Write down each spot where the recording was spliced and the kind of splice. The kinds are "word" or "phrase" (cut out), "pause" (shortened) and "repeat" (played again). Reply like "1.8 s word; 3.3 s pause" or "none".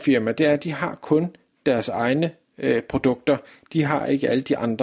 none